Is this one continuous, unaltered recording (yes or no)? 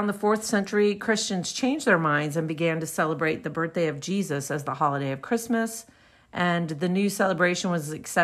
yes